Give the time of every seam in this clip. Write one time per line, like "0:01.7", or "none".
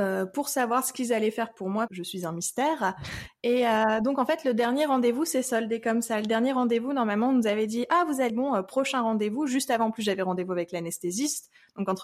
0:01.9
0:08.3